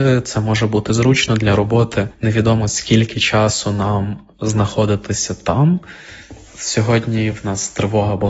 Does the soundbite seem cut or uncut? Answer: uncut